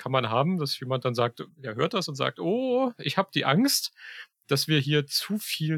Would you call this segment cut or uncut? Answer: uncut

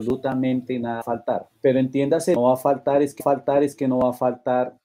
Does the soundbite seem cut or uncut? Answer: cut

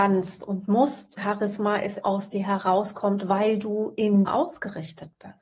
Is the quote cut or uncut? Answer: cut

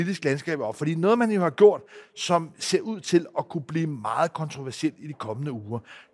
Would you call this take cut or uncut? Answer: uncut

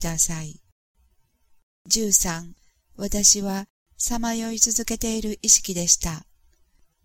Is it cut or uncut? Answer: uncut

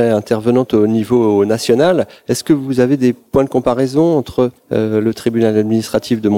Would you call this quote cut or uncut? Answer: cut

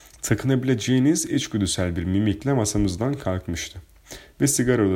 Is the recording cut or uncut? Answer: uncut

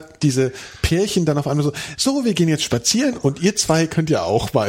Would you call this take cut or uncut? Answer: uncut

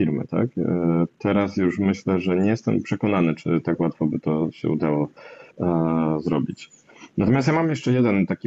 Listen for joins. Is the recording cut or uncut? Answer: cut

